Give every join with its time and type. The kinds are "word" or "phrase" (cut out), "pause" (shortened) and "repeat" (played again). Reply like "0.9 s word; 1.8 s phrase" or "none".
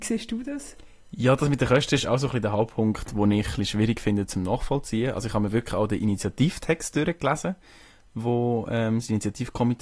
none